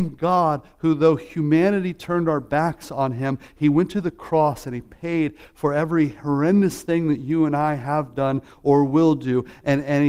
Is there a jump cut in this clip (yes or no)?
no